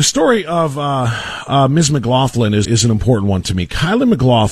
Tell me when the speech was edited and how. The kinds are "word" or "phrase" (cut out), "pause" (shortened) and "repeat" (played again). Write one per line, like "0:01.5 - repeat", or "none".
0:02.6 - word

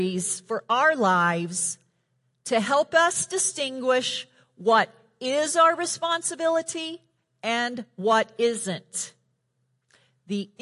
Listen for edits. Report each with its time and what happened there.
none

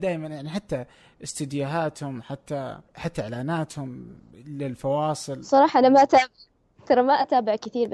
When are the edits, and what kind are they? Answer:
0:02.9 - pause

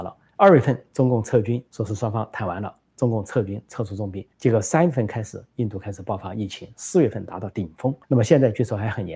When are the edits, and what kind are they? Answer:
0:01.7 - pause
0:04.3 - pause
0:08.0 - pause

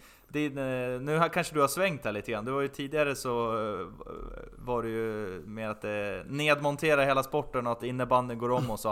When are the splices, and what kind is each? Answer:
none

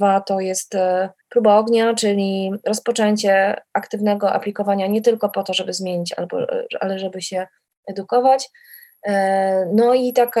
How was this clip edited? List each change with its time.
0:01.2 - pause

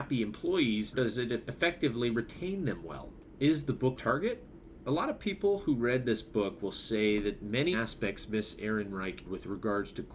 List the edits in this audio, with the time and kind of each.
0:00.9 - word
0:04.0 - word
0:07.7 - phrase
0:09.2 - word

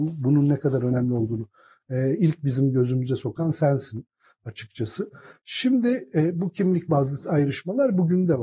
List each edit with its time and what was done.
none

